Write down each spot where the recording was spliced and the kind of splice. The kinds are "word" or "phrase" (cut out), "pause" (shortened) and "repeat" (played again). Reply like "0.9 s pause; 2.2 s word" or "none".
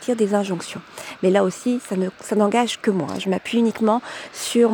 2.1 s pause